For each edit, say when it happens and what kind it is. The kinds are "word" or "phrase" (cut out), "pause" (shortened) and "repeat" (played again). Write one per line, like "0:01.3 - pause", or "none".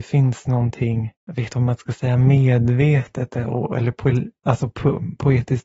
0:01.2 - pause
0:01.5 - word